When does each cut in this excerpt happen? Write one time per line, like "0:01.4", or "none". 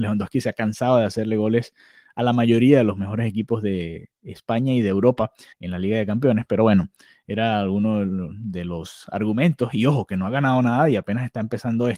0:05.5